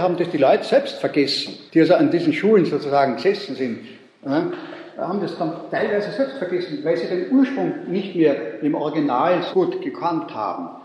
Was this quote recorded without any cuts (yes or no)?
no